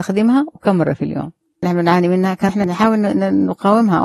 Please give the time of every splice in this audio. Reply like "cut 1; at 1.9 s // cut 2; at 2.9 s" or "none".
cut 1; at 1.6 s // cut 2; at 2.5 s